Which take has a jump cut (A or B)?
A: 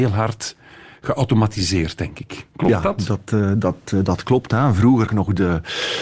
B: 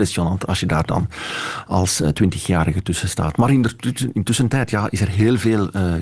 A